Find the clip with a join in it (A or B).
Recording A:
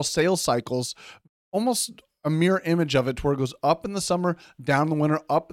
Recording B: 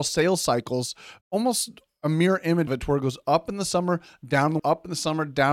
B